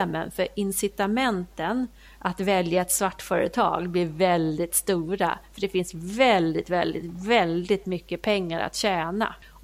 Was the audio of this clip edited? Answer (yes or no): no